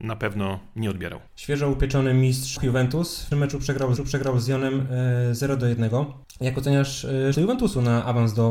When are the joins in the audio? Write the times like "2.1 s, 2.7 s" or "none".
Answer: 1.3 s, 2.6 s, 3.3 s, 4.0 s, 6.2 s, 7.3 s